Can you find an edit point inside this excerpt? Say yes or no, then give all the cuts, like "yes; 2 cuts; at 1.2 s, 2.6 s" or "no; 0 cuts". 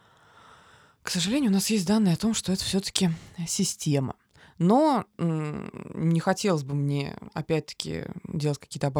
no; 0 cuts